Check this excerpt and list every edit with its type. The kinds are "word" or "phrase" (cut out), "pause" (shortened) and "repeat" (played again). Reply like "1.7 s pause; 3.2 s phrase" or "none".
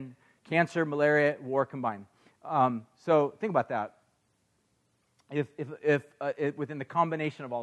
none